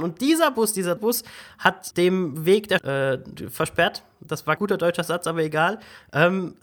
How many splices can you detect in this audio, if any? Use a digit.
4